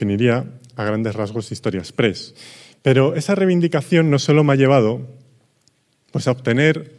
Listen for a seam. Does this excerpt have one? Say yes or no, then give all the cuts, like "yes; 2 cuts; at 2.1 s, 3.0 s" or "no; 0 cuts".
no; 0 cuts